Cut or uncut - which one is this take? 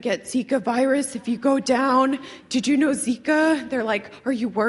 uncut